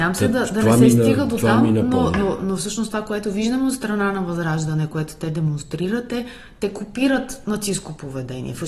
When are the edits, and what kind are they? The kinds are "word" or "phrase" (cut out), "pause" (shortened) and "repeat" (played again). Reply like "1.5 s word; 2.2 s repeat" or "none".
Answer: none

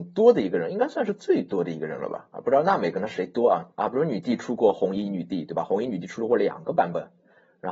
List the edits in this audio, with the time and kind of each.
3.7 s pause

